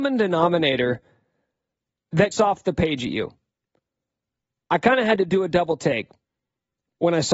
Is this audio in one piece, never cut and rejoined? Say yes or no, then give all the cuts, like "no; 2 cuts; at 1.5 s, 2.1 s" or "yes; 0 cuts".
no; 1 cut; at 2.3 s